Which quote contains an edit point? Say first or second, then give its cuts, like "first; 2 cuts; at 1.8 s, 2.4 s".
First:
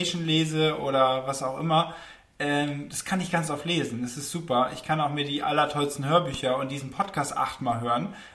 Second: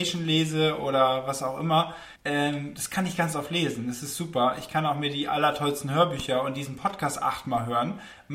second; 1 cut; at 2.2 s